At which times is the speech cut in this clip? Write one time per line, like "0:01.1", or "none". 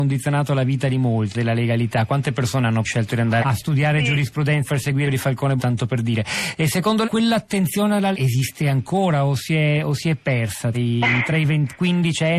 0:01.3
0:02.8
0:03.4
0:04.7
0:05.0
0:05.6
0:07.0
0:08.1
0:10.7